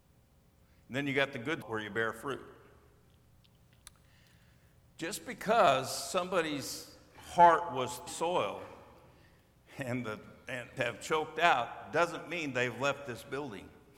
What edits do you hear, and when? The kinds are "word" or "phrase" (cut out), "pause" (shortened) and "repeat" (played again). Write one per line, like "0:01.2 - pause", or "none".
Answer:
0:01.6 - word
0:08.1 - word
0:10.8 - word

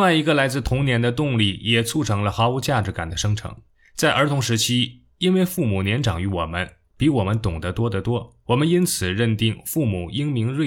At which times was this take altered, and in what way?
0:03.7 - pause
0:06.8 - pause
0:08.4 - pause

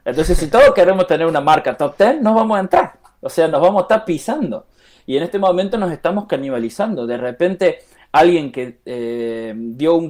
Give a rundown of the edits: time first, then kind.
none

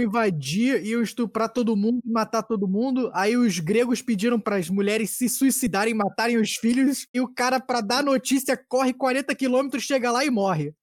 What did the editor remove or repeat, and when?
0:07.1 - phrase

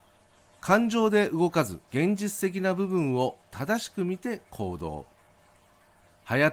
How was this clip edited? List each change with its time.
0:01.8 - pause

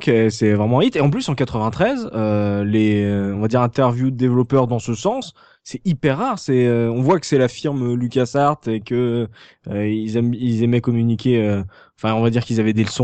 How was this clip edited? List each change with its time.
none

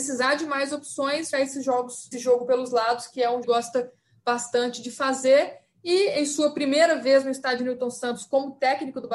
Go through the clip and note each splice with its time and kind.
0:01.3 - phrase
0:02.1 - word
0:03.4 - phrase

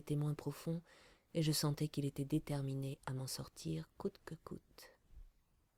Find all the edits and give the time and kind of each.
none

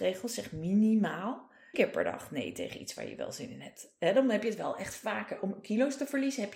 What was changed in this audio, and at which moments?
0:01.7 - word

